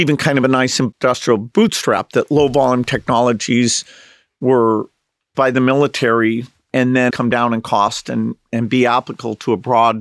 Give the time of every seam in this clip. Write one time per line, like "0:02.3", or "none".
0:05.3
0:07.1

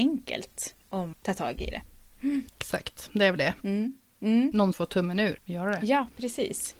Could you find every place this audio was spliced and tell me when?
0:01.1
0:02.5
0:04.7
0:05.4

